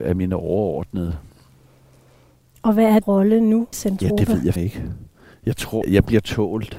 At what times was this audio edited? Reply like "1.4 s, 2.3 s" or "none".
3.0 s, 3.7 s, 4.6 s, 5.8 s